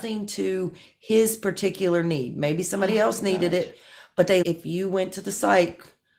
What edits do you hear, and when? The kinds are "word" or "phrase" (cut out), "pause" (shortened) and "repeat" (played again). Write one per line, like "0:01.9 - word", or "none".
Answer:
0:04.4 - word